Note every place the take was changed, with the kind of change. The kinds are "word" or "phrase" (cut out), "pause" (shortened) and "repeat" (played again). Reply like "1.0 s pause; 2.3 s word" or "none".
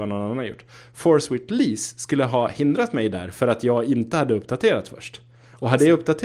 none